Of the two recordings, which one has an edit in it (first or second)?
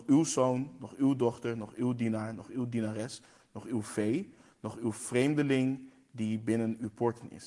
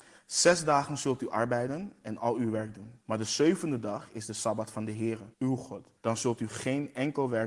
second